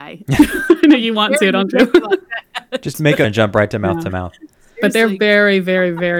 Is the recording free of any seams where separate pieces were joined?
no; 1 cut; at 3.2 s

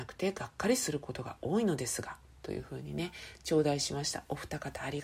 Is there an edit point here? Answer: no; 0 cuts

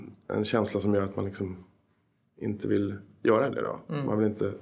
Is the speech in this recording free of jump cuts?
yes; 0 cuts

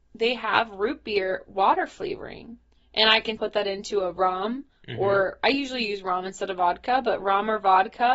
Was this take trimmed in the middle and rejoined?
yes; 2 cuts; at 2.7 s, 3.4 s

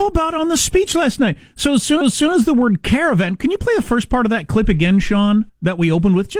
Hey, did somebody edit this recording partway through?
yes; 2 cuts; at 2.0 s, 5.5 s

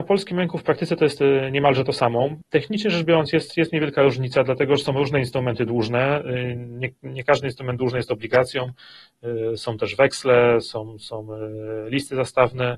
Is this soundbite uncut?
yes; 0 cuts

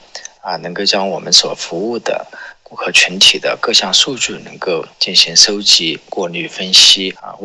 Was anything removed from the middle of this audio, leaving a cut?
yes; 1 cut; at 4.9 s

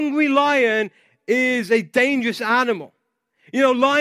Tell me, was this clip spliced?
no; 0 cuts

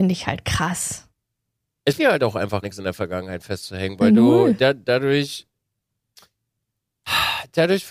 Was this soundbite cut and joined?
yes; 2 cuts; at 2.0 s, 2.6 s

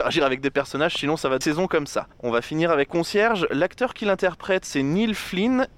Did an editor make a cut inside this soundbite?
yes; 3 cuts; at 1.4 s, 2.1 s, 2.9 s

